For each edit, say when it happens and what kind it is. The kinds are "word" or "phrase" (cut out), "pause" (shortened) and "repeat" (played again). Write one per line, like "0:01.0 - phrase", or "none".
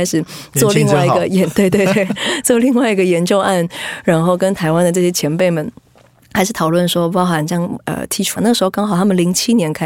0:08.4 - word